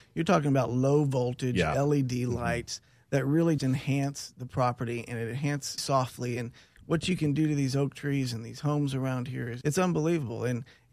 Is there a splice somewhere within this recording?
yes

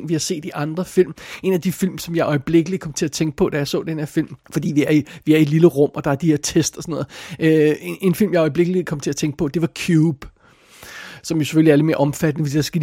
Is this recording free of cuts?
no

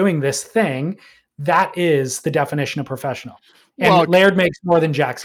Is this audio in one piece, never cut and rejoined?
yes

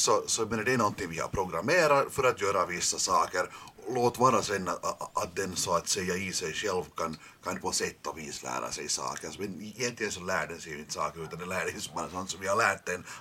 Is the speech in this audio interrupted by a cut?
no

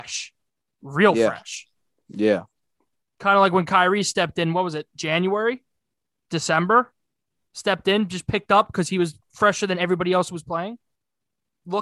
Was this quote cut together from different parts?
yes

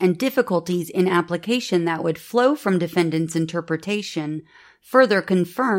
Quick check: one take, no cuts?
yes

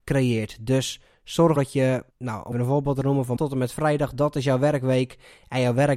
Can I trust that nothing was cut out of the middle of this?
no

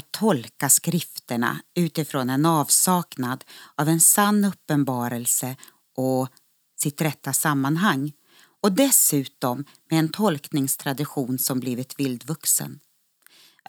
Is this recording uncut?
yes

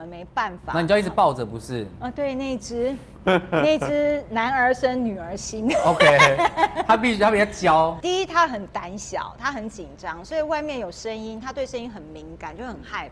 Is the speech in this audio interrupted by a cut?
no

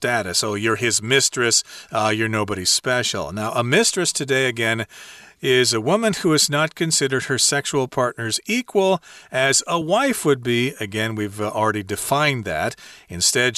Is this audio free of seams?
yes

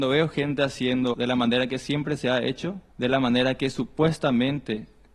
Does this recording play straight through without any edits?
no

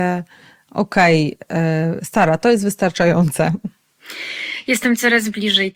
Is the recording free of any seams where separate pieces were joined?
yes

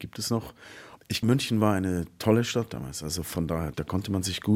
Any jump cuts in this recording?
yes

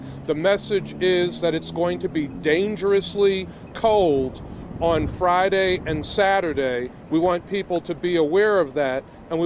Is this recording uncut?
yes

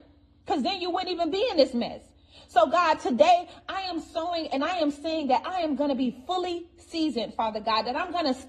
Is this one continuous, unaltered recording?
yes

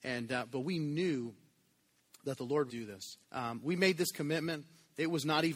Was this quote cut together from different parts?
yes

